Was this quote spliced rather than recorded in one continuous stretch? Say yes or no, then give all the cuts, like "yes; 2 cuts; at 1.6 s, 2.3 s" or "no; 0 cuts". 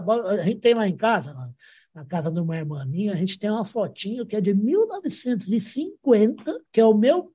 no; 0 cuts